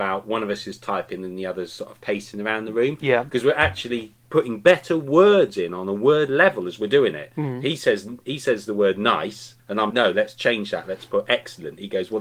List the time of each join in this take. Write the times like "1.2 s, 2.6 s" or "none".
4.2 s, 9.6 s, 9.9 s